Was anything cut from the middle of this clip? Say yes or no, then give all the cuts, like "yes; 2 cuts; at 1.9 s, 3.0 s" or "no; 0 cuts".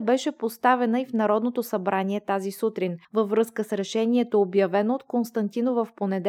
yes; 1 cut; at 3.0 s